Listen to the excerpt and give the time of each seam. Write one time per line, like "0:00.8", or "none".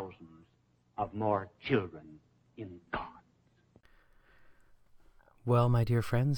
none